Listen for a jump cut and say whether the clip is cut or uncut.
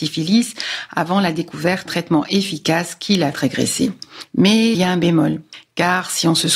cut